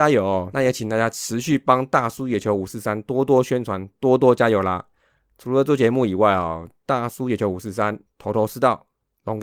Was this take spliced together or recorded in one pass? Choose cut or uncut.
cut